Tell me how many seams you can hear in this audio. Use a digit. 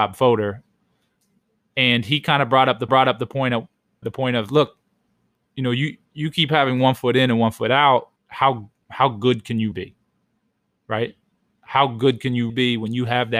6